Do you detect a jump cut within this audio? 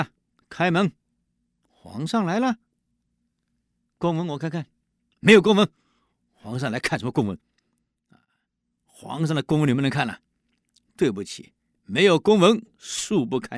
no; 0 cuts

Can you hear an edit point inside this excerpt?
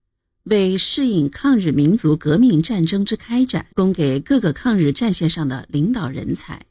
yes; 1 cut; at 3.7 s

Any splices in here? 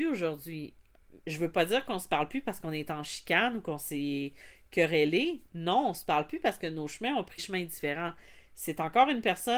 yes; 2 cuts; at 1.2 s, 7.4 s

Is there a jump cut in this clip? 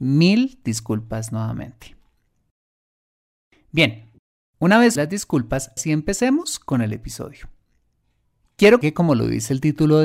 yes; 3 cuts; at 5.0 s, 5.8 s, 8.8 s

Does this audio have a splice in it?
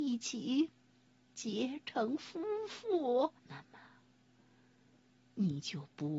yes; 1 cut; at 3.4 s

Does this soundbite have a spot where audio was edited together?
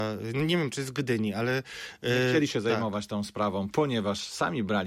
no; 0 cuts

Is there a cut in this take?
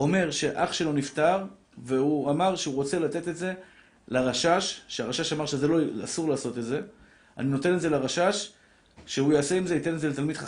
no; 0 cuts

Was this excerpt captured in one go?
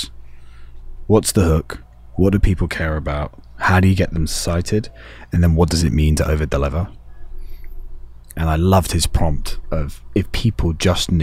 yes; 0 cuts

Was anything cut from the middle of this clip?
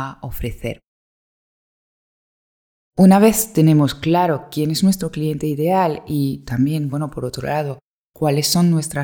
no; 0 cuts

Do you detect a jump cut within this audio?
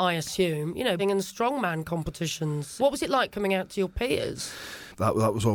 yes; 2 cuts; at 1.0 s, 2.8 s

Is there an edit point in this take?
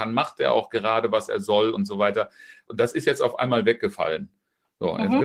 no; 0 cuts

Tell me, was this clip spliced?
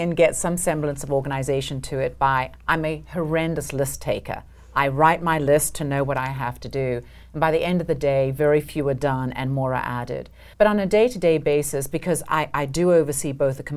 yes; 1 cut; at 10.5 s

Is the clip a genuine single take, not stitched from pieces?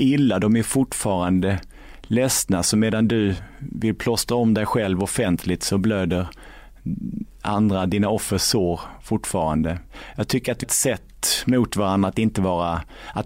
no; 1 cut; at 10.6 s

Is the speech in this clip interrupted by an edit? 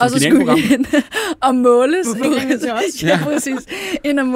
yes; 1 cut; at 2.2 s

